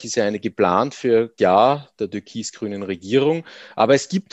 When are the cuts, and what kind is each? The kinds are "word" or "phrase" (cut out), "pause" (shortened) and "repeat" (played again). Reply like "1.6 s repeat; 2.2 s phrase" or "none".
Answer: 1.4 s word